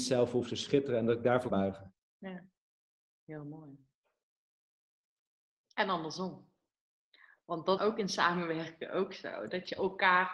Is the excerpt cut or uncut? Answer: cut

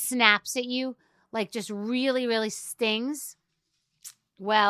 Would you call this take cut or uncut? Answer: uncut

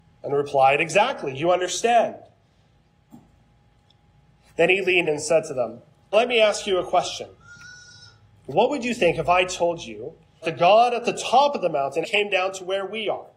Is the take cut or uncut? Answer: cut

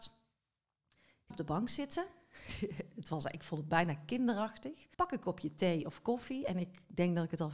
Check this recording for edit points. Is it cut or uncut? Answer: cut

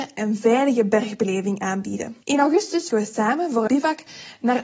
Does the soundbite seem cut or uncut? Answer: cut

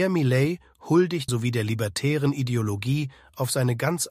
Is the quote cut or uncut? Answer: cut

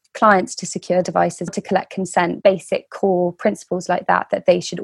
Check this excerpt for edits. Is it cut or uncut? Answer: cut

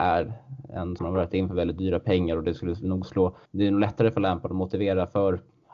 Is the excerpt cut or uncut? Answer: cut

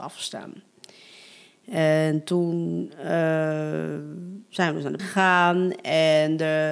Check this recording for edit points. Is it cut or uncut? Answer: cut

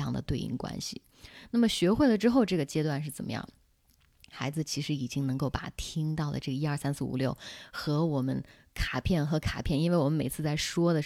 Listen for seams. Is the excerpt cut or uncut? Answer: uncut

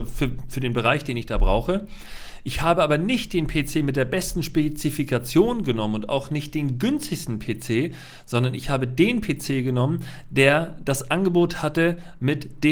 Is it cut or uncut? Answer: uncut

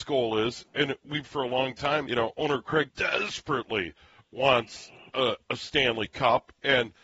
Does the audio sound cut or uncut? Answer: cut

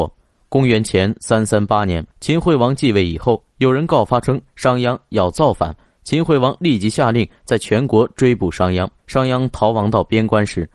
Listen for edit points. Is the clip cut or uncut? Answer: cut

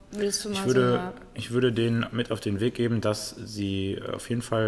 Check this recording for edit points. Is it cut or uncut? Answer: uncut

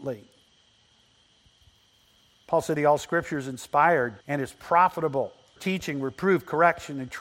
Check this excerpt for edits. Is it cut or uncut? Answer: cut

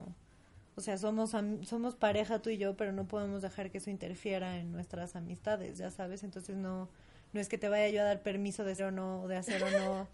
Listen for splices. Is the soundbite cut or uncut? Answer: cut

